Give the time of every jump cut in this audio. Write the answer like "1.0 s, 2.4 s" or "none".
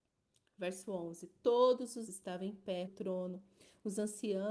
2.1 s, 2.9 s